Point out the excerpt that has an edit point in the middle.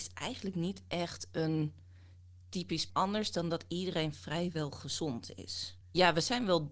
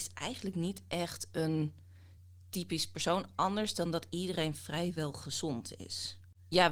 first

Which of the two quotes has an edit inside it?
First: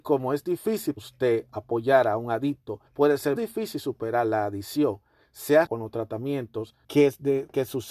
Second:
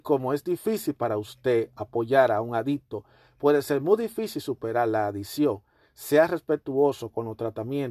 first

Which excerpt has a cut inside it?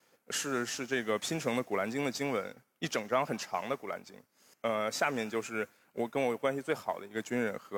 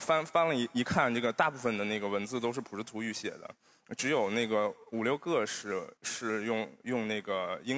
second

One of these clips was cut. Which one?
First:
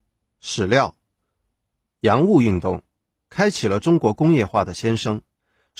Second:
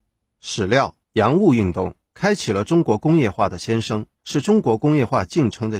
second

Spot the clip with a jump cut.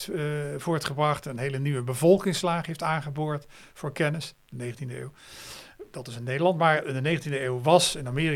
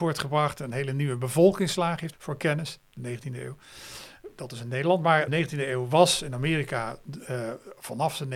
second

